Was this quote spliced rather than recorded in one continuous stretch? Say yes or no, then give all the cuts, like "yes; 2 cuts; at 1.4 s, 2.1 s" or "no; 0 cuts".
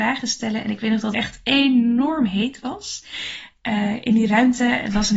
yes; 1 cut; at 1.1 s